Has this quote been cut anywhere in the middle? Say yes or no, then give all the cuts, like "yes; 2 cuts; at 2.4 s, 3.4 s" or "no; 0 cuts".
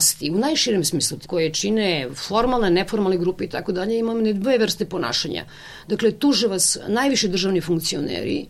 yes; 1 cut; at 1.3 s